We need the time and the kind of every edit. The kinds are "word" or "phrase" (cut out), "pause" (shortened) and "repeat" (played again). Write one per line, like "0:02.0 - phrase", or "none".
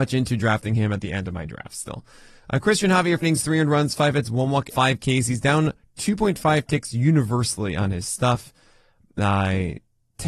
0:03.2 - word
0:04.7 - word